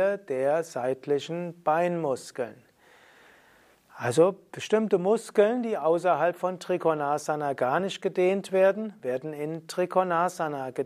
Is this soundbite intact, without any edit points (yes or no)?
yes